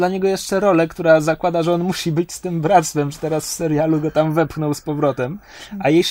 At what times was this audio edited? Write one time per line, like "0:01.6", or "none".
none